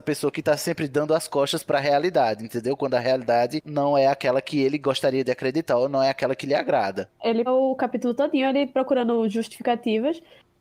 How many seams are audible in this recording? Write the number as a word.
two